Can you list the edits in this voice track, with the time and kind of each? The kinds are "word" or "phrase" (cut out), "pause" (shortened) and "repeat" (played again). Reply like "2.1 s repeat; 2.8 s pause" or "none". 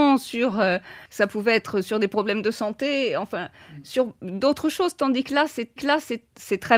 1.1 s pause; 5.8 s repeat